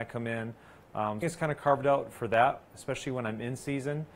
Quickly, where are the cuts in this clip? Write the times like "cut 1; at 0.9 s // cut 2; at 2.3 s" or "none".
cut 1; at 1.2 s